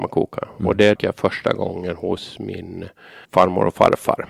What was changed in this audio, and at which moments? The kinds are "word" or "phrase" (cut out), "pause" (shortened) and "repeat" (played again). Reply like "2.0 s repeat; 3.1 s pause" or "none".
1.0 s word; 3.2 s pause